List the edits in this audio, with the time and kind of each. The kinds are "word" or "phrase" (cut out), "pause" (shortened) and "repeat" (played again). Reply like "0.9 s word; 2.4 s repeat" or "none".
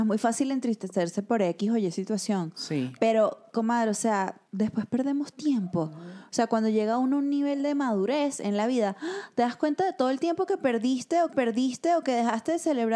4.5 s pause; 5.3 s word; 11.3 s repeat